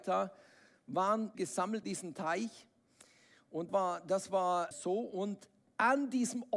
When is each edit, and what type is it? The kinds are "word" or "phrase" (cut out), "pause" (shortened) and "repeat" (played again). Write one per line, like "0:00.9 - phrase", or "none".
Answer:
0:01.3 - word
0:01.8 - word
0:03.7 - word
0:04.7 - word